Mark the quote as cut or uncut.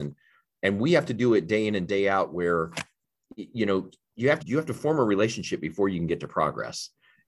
cut